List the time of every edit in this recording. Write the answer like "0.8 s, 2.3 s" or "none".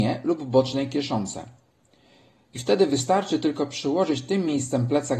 none